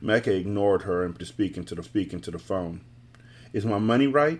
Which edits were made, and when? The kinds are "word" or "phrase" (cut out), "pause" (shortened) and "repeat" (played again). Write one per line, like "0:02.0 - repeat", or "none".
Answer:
0:01.2 - word
0:01.8 - repeat